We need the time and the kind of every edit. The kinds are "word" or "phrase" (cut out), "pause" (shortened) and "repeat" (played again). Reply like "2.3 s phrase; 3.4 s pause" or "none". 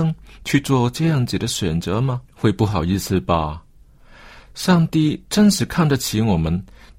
2.3 s pause